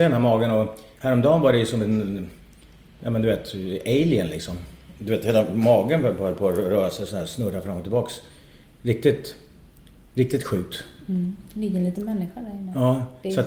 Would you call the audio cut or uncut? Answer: uncut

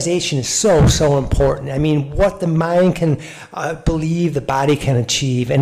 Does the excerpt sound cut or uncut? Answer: uncut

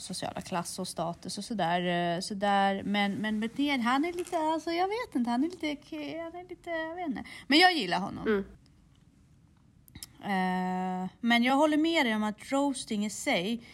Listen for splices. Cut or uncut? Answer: uncut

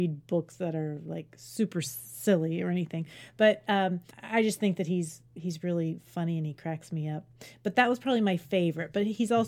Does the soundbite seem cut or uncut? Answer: cut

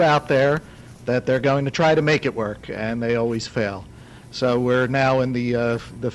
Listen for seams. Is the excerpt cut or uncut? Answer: uncut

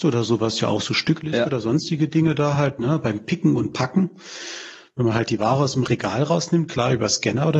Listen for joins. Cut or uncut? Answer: uncut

